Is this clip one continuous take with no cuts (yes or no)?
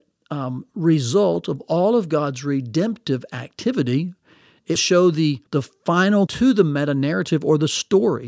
no